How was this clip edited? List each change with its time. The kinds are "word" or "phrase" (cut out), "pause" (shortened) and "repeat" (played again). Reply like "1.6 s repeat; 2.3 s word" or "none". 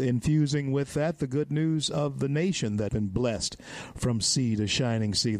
2.9 s word